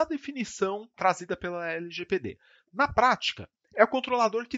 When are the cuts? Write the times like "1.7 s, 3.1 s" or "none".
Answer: none